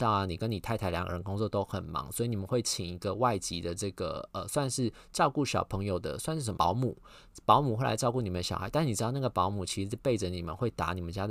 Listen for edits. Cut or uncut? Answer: cut